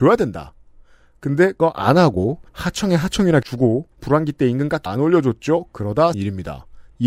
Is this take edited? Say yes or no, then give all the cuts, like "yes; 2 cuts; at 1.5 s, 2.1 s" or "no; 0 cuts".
yes; 6 cuts; at 1.6 s, 2.5 s, 3.4 s, 3.9 s, 4.9 s, 6.1 s